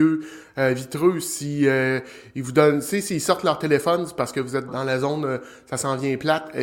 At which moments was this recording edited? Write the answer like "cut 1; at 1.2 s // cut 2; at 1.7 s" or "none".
cut 1; at 4.7 s